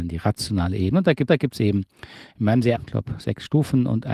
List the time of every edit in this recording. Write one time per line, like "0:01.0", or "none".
0:01.3
0:02.8